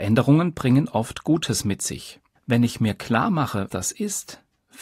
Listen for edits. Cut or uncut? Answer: cut